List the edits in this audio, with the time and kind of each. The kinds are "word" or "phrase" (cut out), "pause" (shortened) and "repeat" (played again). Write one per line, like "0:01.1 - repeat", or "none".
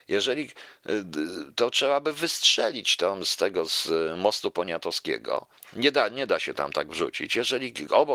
0:05.6 - pause
0:06.9 - word